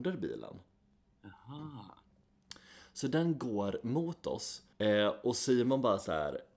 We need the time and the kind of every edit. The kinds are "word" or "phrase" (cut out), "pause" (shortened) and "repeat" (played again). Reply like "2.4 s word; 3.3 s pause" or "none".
4.7 s pause